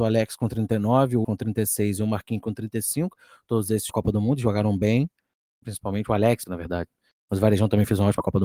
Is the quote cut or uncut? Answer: cut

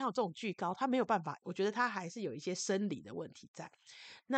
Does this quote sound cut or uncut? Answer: cut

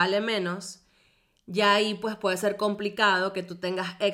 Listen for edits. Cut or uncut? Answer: uncut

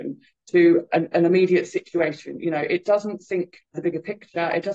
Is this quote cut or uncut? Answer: cut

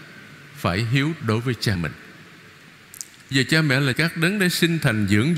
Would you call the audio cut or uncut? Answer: cut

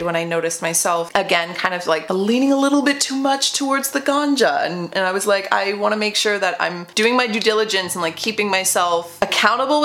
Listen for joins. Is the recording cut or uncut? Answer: uncut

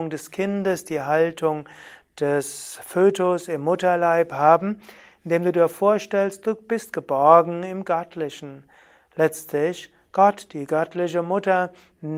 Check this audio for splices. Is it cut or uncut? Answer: uncut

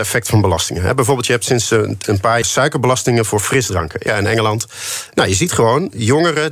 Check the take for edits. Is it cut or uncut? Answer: cut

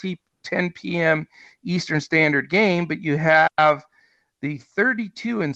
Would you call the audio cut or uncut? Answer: uncut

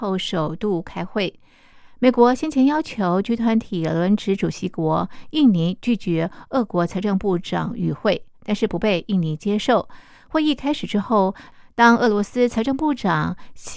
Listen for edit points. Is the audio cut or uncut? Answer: uncut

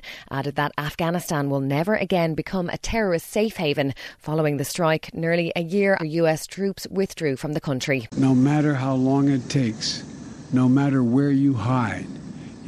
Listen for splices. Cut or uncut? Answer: cut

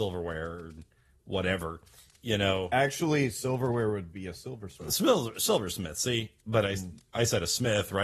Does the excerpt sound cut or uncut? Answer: uncut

